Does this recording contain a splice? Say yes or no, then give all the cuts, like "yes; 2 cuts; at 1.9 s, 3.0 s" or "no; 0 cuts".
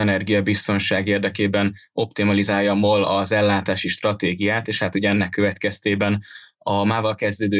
no; 0 cuts